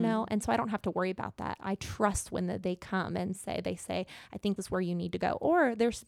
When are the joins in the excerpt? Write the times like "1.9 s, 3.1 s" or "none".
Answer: 4.6 s